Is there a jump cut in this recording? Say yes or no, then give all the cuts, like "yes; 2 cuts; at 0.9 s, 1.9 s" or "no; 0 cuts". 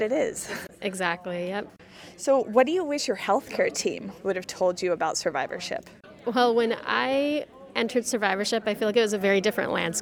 no; 0 cuts